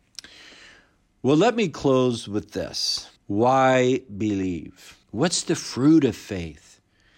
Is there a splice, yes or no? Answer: yes